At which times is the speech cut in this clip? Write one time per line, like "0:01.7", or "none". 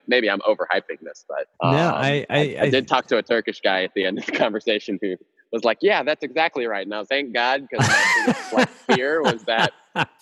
0:01.5
0:07.1